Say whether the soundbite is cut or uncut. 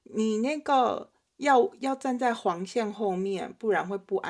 uncut